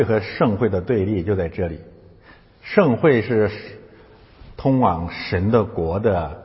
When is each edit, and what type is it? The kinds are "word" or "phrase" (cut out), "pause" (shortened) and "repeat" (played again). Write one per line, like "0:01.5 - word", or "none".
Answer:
none